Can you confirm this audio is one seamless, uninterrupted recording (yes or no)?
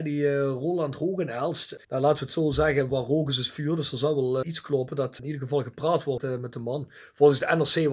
no